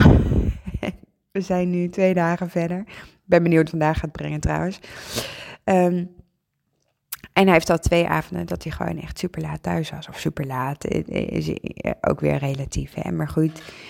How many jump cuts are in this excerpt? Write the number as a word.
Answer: one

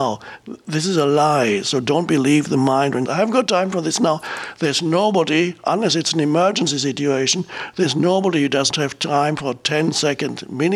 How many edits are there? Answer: two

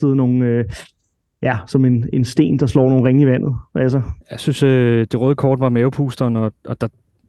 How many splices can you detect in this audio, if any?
one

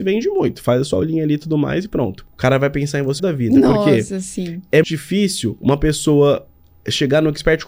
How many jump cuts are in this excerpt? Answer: three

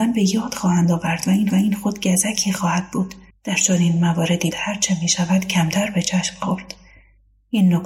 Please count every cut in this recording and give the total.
three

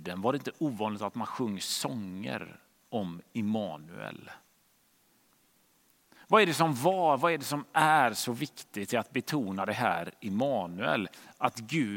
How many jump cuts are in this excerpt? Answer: zero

